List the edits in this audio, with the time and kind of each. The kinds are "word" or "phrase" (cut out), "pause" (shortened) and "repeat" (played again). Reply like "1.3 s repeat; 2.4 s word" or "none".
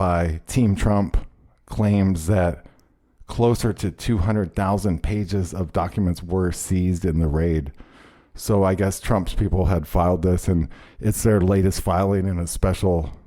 none